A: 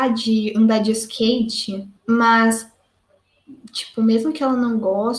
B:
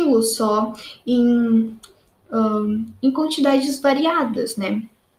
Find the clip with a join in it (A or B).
A